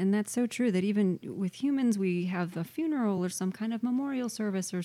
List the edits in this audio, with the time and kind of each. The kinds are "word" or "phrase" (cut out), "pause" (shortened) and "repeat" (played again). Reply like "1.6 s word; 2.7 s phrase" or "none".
none